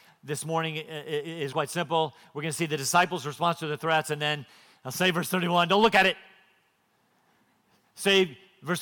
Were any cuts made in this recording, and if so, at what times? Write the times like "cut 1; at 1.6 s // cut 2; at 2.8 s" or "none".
cut 1; at 1.5 s